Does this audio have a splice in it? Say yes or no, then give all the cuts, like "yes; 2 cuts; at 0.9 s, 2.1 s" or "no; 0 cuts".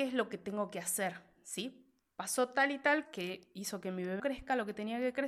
yes; 2 cuts; at 3.0 s, 4.2 s